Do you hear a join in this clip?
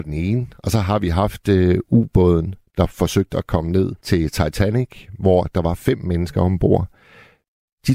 yes; 1 cut; at 4.0 s

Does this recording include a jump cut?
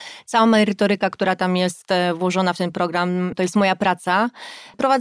no; 0 cuts

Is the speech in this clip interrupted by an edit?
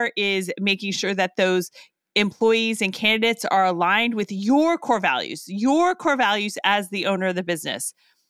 no; 0 cuts

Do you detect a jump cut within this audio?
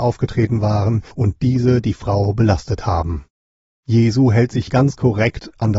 yes; 2 cuts; at 1.1 s, 4.7 s

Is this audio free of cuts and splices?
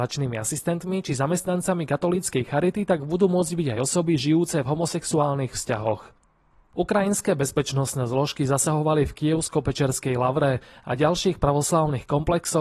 yes; 0 cuts

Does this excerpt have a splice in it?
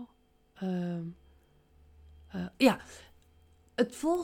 no; 0 cuts

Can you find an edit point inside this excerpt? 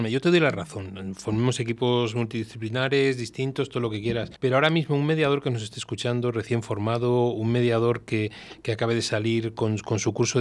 yes; 1 cut; at 4.4 s

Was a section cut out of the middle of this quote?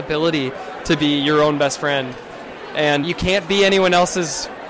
yes; 1 cut; at 3.0 s

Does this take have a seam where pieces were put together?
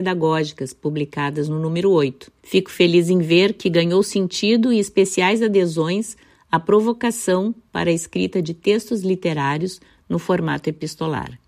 yes; 1 cut; at 2.4 s

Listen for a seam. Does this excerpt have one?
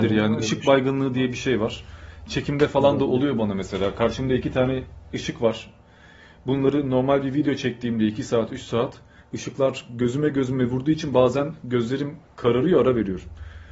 no; 0 cuts

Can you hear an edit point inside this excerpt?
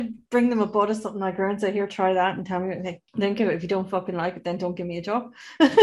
yes; 1 cut; at 3.1 s

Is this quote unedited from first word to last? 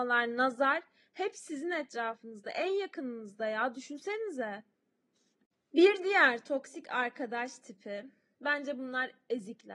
yes; 0 cuts

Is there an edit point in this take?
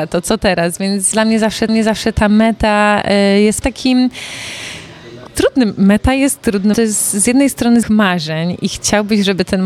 yes; 6 cuts; at 1.1 s, 1.7 s, 3.6 s, 5.3 s, 6.7 s, 7.8 s

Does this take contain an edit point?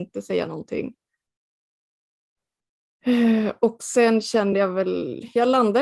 no; 0 cuts

